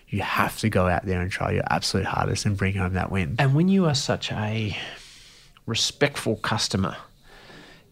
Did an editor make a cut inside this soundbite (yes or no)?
no